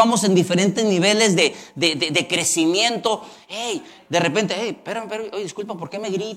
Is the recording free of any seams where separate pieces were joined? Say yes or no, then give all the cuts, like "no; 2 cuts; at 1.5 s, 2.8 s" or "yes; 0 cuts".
yes; 0 cuts